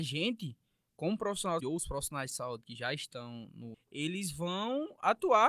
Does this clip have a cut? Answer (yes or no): yes